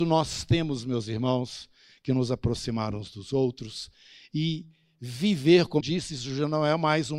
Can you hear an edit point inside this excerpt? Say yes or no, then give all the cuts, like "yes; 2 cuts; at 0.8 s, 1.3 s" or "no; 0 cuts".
yes; 1 cut; at 5.8 s